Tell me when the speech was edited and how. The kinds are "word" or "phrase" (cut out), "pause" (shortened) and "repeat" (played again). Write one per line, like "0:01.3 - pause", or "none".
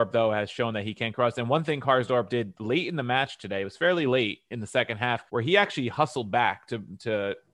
0:05.3 - pause